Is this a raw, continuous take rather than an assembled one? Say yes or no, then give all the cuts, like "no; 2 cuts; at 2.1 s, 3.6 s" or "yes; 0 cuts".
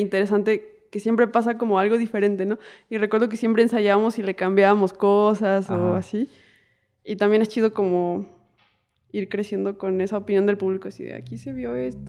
yes; 0 cuts